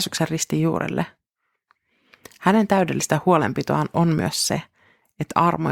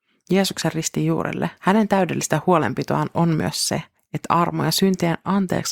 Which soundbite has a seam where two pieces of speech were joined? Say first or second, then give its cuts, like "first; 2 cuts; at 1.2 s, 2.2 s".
second; 2 cuts; at 1.6 s, 4.0 s